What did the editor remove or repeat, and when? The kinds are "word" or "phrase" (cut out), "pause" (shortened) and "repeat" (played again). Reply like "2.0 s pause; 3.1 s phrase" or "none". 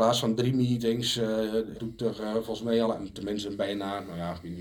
1.7 s word; 2.8 s phrase